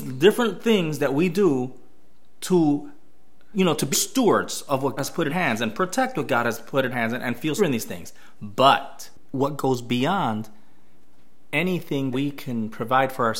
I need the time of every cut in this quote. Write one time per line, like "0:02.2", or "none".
0:03.5
0:03.9
0:05.0
0:05.3
0:06.9
0:07.6
0:12.1